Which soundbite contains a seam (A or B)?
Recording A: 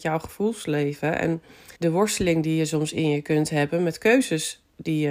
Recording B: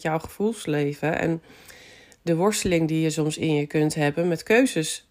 A